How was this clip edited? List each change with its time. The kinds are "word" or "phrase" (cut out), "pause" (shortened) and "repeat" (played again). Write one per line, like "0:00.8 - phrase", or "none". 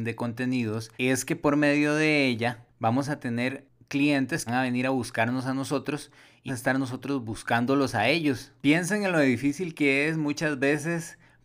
0:00.9 - pause
0:04.5 - phrase
0:06.5 - phrase

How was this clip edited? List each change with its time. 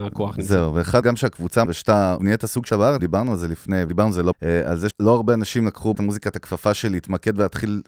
0:01.0 - word
0:01.7 - word
0:02.2 - word
0:02.7 - word
0:03.0 - word
0:03.9 - word
0:04.3 - word
0:04.9 - word
0:05.9 - word

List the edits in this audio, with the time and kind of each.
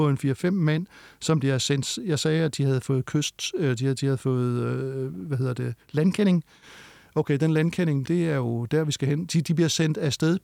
0:08.1 - word

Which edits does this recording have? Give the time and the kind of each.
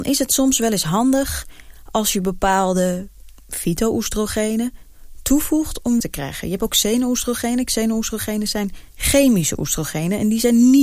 0:06.0 - phrase
0:08.9 - pause

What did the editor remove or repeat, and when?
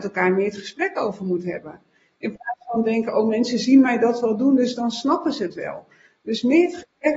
none

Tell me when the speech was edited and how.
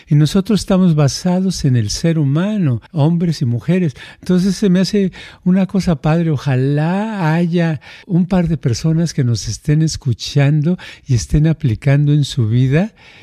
0:02.9 - pause
0:08.0 - word

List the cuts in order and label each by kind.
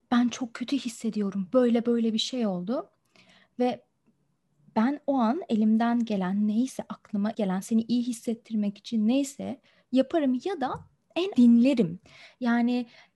0:07.3 - word
0:11.3 - word

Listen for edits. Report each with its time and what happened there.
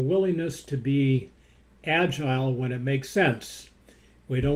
none

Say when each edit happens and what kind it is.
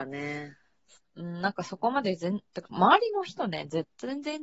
0:01.0 - pause
0:02.7 - word

